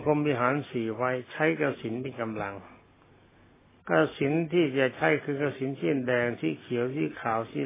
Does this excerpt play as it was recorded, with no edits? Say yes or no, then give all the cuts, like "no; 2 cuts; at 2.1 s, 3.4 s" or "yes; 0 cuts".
yes; 0 cuts